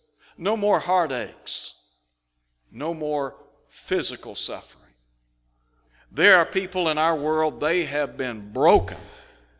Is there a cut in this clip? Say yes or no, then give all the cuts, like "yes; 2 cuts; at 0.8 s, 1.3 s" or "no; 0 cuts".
no; 0 cuts